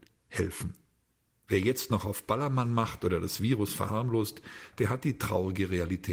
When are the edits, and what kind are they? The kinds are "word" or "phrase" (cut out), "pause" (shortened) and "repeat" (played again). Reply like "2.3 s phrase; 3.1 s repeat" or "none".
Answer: none